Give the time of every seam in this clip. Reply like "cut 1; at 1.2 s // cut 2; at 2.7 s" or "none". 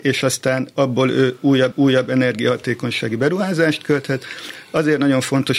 cut 1; at 1.7 s